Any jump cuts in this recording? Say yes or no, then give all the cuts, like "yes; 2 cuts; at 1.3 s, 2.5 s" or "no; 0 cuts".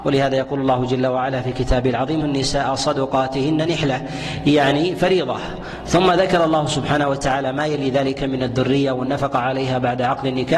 yes; 1 cut; at 2.2 s